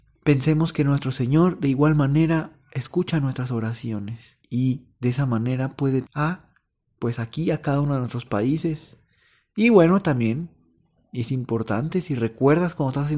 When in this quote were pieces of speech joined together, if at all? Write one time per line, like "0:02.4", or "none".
0:04.4
0:06.0